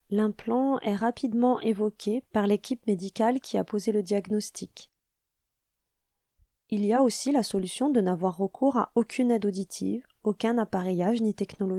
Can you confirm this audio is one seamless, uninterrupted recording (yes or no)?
yes